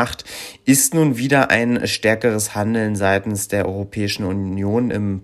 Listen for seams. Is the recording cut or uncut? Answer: uncut